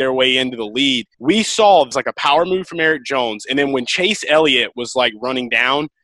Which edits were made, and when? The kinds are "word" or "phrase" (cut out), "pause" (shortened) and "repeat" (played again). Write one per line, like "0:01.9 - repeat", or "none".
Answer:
0:01.1 - pause
0:01.9 - phrase